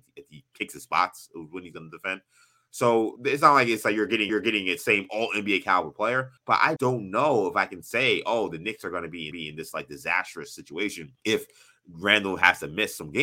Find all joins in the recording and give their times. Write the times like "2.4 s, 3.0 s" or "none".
3.2 s, 3.8 s, 4.3 s, 6.4 s, 6.8 s, 9.3 s, 11.2 s